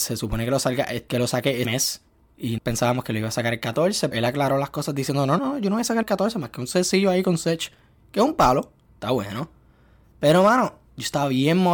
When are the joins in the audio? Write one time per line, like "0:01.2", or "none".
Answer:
0:01.6
0:02.6
0:04.1
0:05.4
0:06.0
0:08.9

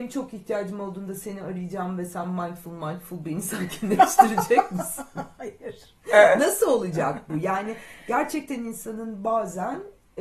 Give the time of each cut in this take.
none

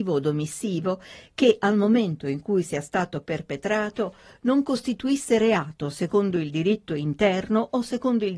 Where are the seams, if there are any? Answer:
none

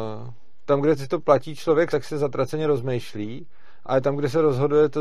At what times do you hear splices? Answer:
0:01.9

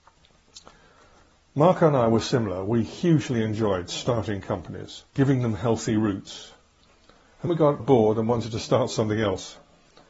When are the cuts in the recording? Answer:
0:05.1
0:07.5
0:07.8

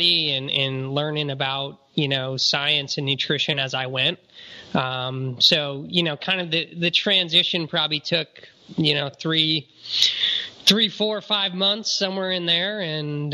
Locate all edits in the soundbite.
none

